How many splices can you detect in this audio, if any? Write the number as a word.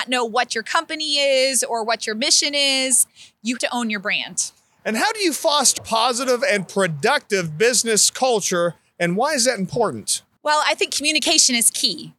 two